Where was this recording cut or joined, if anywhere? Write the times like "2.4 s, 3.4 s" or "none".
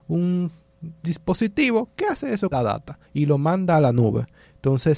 2.5 s, 3.1 s